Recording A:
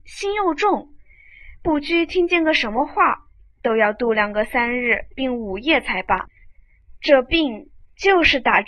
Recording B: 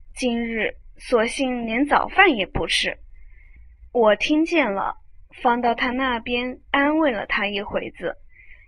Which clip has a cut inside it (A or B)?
B